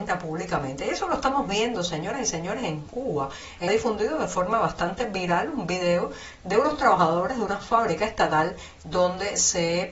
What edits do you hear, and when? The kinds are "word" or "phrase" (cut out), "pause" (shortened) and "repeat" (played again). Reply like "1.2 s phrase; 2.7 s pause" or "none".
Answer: 3.7 s phrase